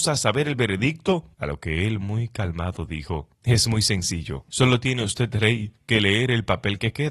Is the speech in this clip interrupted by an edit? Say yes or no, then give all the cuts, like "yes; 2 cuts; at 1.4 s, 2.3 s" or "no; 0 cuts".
yes; 4 cuts; at 1.3 s, 3.3 s, 4.5 s, 5.8 s